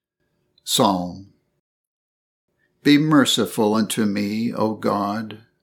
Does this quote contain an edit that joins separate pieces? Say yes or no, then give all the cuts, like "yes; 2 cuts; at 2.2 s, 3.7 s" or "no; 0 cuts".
no; 0 cuts